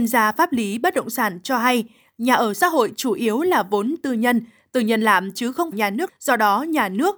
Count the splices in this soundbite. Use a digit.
2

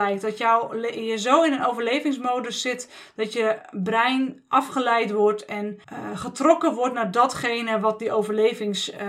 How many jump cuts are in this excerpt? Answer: 1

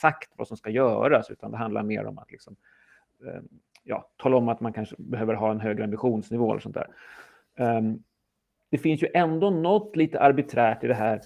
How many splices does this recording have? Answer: 0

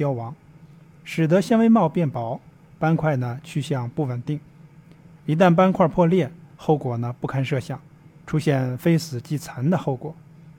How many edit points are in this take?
0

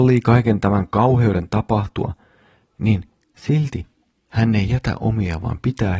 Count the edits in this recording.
0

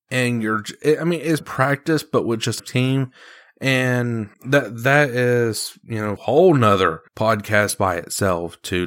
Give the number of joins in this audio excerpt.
5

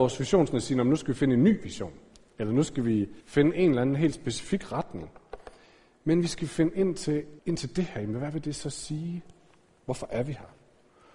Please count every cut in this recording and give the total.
2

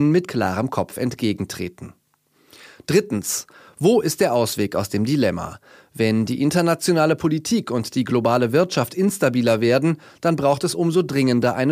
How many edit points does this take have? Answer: 0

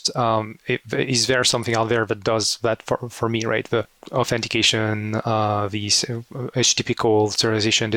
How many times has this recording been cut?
0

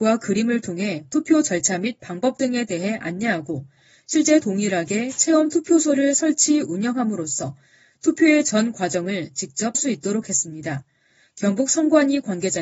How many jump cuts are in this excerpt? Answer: 2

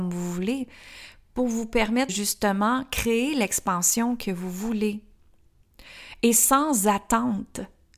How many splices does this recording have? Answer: 1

